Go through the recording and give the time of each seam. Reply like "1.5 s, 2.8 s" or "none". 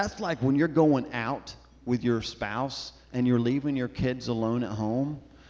none